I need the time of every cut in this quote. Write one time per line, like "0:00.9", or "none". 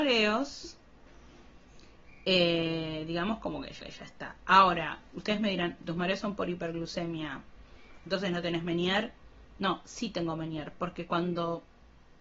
0:03.8
0:05.8